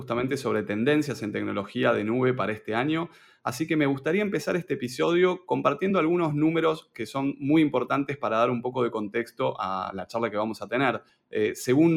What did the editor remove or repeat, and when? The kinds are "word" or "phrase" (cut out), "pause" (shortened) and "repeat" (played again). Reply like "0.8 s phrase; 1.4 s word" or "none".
none